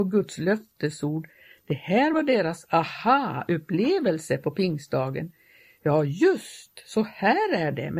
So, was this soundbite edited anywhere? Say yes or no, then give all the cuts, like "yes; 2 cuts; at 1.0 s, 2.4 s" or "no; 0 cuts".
no; 0 cuts